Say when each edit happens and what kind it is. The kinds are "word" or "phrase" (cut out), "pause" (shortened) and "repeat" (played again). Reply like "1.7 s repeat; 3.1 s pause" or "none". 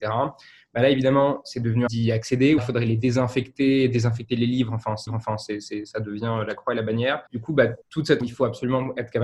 1.9 s word; 2.6 s word; 5.1 s repeat; 7.3 s pause; 7.8 s pause; 8.2 s word

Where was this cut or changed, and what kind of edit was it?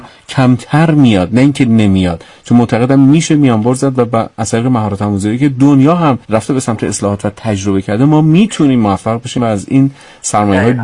6.2 s pause

